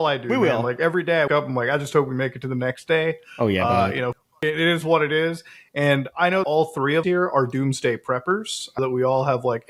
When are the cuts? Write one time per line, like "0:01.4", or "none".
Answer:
0:01.3
0:06.4
0:07.0
0:08.8